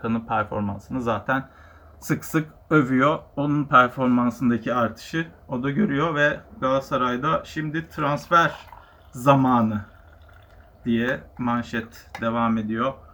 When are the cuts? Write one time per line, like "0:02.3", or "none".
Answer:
0:11.3

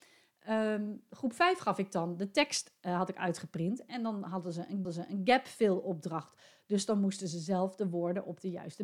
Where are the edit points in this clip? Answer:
0:04.8

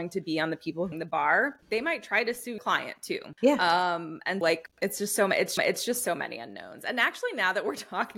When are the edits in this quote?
0:00.9
0:01.6
0:02.6
0:03.4
0:04.4
0:04.7
0:05.6

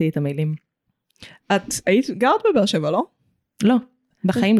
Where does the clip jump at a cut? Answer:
none

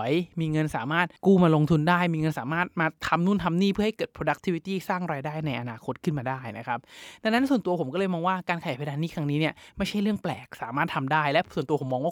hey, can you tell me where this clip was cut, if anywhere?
0:01.2

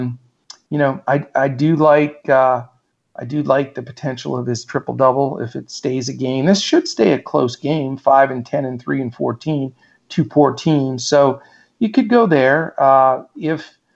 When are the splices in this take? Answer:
none

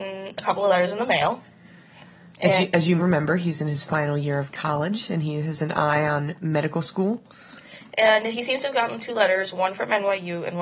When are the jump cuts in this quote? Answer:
0:03.0

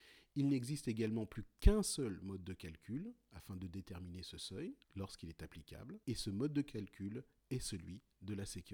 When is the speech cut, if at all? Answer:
0:04.8
0:06.0

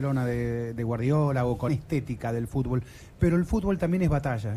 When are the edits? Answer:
0:01.7

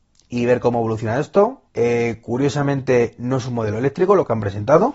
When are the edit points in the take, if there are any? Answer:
0:01.7

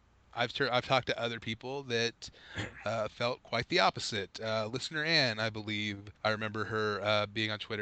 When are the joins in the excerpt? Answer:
0:06.2

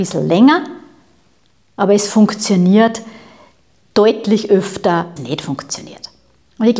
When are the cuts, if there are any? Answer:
0:05.2

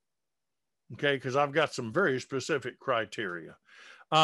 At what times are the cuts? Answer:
none

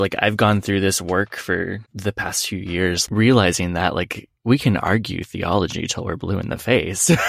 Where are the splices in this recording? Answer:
0:01.8
0:03.1
0:04.4

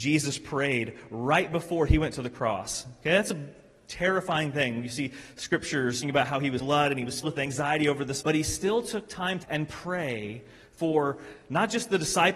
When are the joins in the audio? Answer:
0:06.0
0:06.6
0:07.2
0:08.2
0:09.4

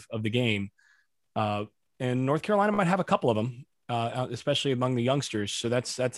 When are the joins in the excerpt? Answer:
none

